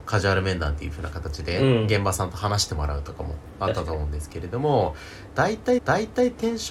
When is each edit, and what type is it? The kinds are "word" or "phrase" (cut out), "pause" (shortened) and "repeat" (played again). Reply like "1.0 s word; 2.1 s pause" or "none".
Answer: 5.8 s repeat